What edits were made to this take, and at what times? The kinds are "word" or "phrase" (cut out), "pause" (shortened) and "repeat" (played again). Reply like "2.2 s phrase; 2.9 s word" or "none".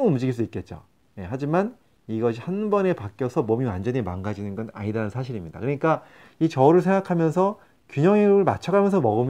none